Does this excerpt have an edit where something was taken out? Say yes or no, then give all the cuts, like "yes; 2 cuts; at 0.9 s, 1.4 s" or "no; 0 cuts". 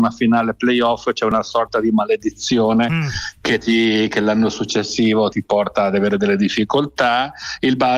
yes; 1 cut; at 5.3 s